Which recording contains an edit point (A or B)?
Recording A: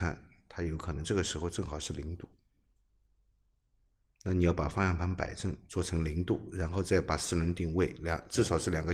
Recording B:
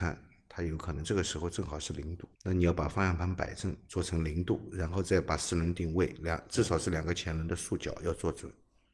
B